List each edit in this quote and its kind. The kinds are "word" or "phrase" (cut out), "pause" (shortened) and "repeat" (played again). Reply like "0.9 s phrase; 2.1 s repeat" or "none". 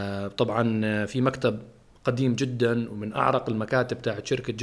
none